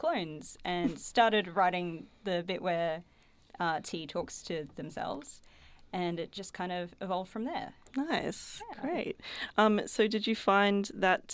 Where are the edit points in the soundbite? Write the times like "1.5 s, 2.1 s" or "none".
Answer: none